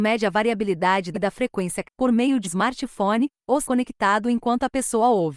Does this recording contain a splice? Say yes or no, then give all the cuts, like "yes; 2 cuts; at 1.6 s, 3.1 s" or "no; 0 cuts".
yes; 4 cuts; at 1.1 s, 1.8 s, 2.4 s, 3.6 s